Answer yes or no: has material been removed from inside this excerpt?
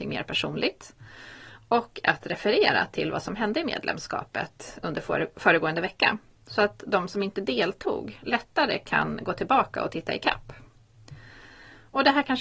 no